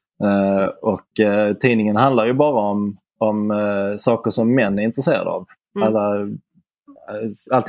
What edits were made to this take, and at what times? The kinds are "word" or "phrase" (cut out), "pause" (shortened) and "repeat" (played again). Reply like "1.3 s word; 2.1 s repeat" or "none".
none